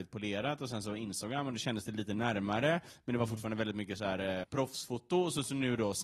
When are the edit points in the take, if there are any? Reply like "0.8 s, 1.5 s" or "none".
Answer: 4.4 s